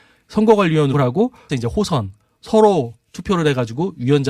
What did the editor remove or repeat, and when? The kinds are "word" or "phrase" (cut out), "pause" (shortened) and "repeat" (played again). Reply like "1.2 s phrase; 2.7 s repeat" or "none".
0.9 s word; 1.5 s word

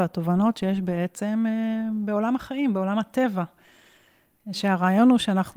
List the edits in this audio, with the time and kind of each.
none

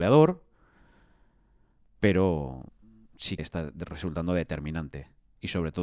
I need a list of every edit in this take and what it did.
3.4 s word

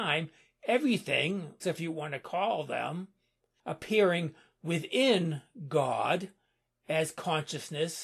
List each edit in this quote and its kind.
1.6 s word

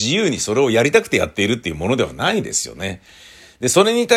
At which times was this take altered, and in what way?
none

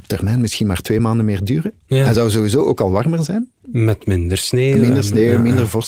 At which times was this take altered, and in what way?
none

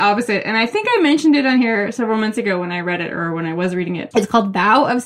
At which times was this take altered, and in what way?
4.1 s word

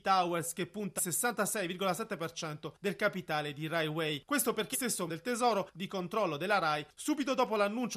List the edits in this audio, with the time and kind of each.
1.0 s word; 4.7 s word; 5.1 s word; 5.7 s word

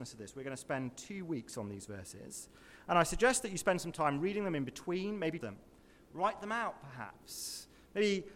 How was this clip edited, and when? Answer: 5.4 s phrase

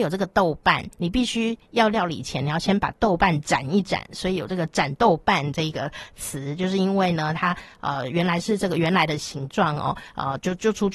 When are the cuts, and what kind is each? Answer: 0.9 s pause

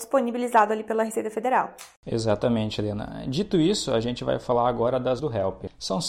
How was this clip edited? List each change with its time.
5.2 s word

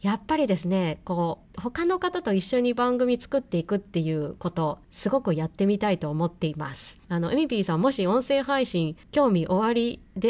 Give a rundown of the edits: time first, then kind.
1.5 s pause; 4.8 s pause; 7.0 s pause; 9.0 s pause

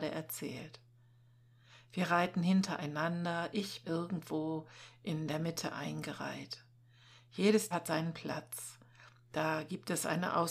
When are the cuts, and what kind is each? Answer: 3.8 s word; 7.7 s word

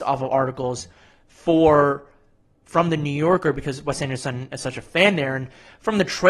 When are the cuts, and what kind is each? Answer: none

